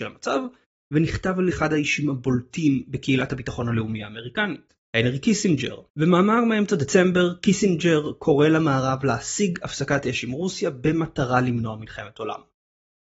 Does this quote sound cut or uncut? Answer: cut